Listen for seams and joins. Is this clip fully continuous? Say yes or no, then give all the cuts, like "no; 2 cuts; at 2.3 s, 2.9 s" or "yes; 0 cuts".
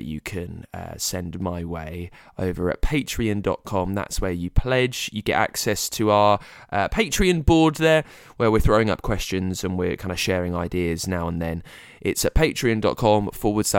yes; 0 cuts